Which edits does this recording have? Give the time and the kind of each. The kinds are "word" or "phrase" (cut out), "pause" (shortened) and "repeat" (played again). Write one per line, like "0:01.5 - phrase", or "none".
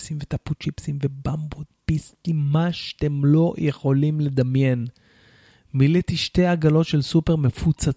none